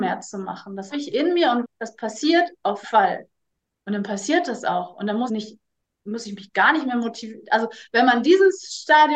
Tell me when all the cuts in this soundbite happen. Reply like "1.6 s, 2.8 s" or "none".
0.9 s, 1.6 s, 2.8 s, 5.3 s